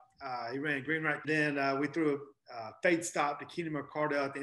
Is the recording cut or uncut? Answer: cut